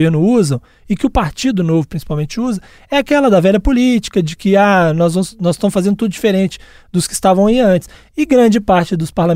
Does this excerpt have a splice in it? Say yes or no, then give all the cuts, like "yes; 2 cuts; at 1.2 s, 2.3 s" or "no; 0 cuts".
no; 0 cuts